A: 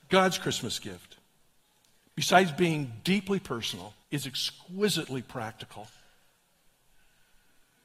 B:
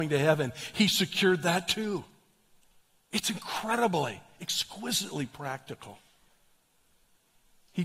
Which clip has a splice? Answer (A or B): A